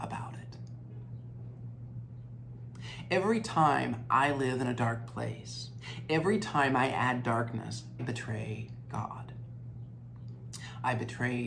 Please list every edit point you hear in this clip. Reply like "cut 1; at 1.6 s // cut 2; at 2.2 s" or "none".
cut 1; at 8.0 s